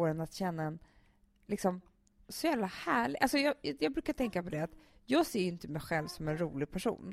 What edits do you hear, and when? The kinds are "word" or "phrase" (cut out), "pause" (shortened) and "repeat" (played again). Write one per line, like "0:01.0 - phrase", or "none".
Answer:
none